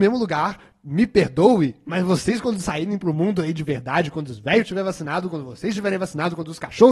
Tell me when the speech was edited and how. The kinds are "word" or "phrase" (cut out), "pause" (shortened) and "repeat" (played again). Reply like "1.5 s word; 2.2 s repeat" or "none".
none